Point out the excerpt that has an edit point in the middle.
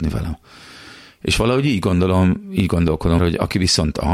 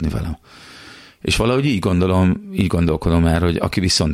first; 1 cut; at 3.2 s

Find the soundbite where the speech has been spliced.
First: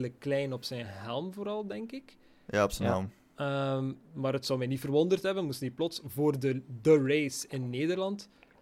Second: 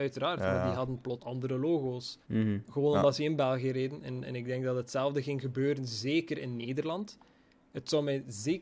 second; 2 cuts; at 1.2 s, 2.2 s

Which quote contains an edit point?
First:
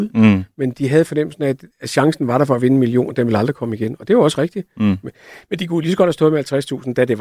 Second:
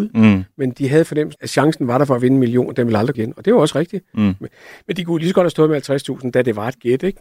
second; 2 cuts; at 1.4 s, 3.1 s

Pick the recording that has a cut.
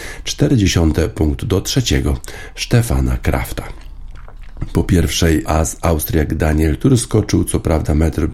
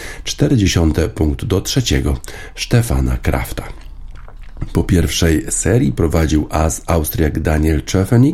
first; 2 cuts; at 5.4 s, 6.8 s

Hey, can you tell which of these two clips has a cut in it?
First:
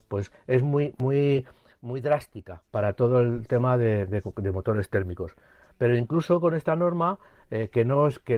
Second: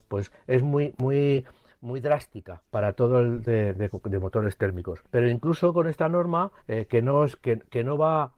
second; 3 cuts; at 3.5 s, 5.0 s, 6.6 s

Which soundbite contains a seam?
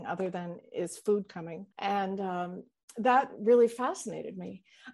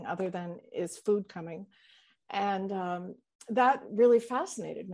first; 1 cut; at 1.7 s

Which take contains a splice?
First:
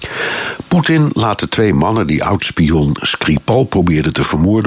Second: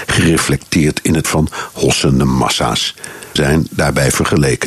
second; 2 cuts; at 1.2 s, 3.4 s

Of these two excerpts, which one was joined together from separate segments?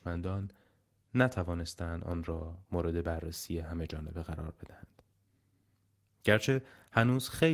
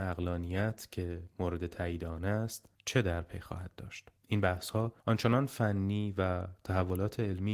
second; 3 cuts; at 2.7 s, 4.2 s, 5.0 s

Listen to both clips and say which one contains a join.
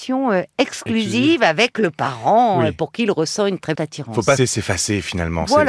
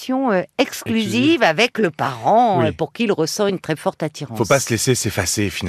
first; 2 cuts; at 3.8 s, 4.4 s

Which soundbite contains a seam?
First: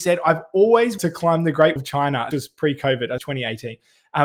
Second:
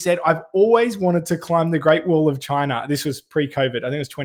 first; 4 cuts; at 1.0 s, 1.8 s, 2.3 s, 3.2 s

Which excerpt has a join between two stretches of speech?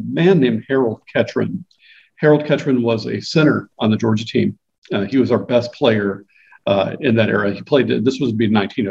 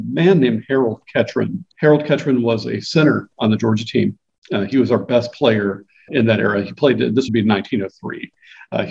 second; 3 cuts; at 1.7 s, 6.1 s, 7.3 s

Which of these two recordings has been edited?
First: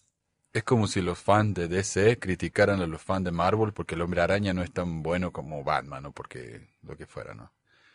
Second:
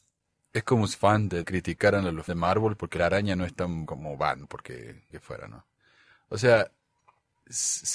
second; 7 cuts; at 0.9 s, 1.4 s, 2.3 s, 3.0 s, 3.9 s, 4.4 s, 5.1 s

